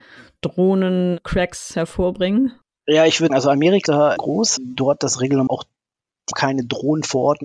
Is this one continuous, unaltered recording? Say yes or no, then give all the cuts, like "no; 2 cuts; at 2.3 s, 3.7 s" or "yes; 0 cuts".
no; 6 cuts; at 3.3 s, 3.9 s, 4.2 s, 4.6 s, 5.5 s, 6.3 s